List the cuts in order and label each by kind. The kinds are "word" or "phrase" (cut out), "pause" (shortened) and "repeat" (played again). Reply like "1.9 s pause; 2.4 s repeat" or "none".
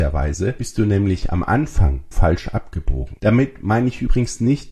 2.1 s word

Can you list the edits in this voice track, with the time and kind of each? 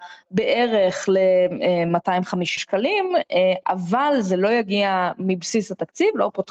2.6 s word

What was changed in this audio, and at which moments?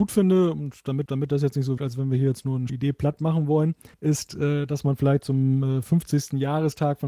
1.1 s repeat; 1.8 s word; 2.7 s word; 3.9 s pause

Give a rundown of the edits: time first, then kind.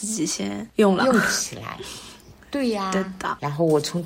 none

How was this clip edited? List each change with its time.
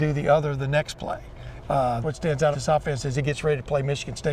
2.0 s word; 2.5 s word

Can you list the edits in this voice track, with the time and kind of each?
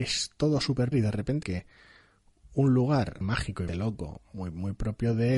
0.9 s word; 1.4 s word; 3.2 s word; 3.7 s word

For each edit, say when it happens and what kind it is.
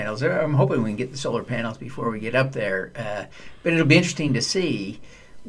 none

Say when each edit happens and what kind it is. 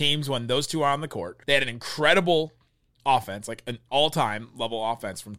1.4 s pause

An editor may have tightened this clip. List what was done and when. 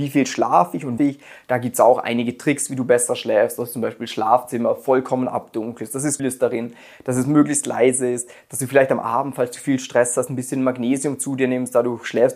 1.0 s phrase; 6.2 s word

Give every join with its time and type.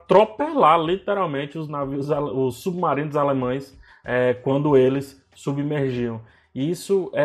none

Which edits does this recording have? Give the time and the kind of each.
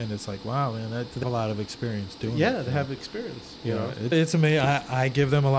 1.2 s word; 4.1 s word

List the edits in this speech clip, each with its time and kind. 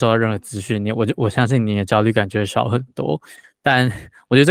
none

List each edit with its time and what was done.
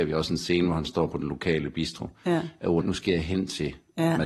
2.8 s word

